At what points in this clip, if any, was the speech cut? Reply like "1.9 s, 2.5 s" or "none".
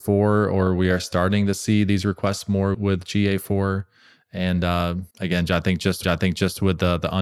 2.7 s, 5.1 s, 6.0 s